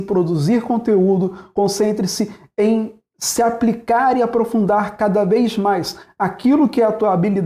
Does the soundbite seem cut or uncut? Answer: uncut